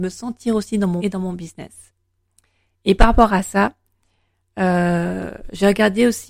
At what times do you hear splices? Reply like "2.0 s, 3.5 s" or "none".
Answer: 1.0 s